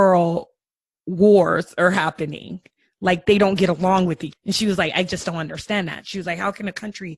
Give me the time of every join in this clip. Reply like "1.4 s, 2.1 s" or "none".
4.3 s

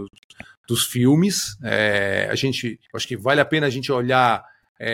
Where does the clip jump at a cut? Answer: 2.9 s

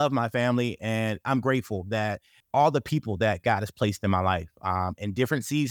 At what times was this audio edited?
2.4 s

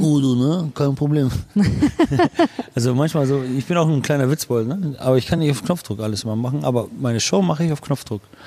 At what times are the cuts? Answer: none

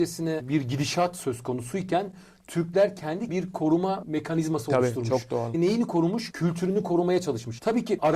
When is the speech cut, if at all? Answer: 3.3 s

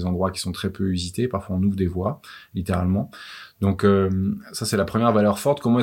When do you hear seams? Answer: none

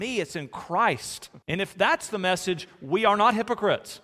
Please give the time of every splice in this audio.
1.4 s

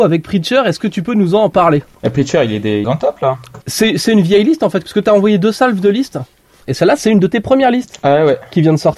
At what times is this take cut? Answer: 1.9 s, 2.8 s, 3.6 s, 4.8 s, 6.6 s

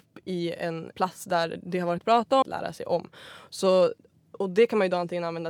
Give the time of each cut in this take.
0.9 s, 2.0 s, 2.4 s, 4.3 s

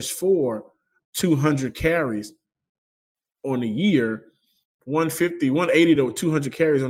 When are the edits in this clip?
none

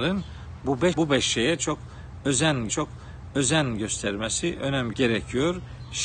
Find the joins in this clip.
0.9 s, 2.7 s, 4.9 s

